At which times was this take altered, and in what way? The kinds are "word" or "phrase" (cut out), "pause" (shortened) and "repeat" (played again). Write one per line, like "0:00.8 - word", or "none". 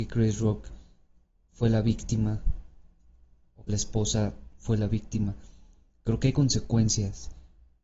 0:03.7 - phrase